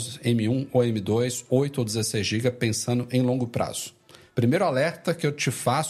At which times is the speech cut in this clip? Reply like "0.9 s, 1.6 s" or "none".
none